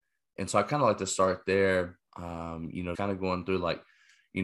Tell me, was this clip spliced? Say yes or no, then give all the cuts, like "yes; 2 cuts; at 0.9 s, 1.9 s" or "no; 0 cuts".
yes; 2 cuts; at 2.1 s, 2.9 s